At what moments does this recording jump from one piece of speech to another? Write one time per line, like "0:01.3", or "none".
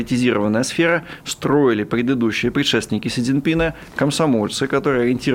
none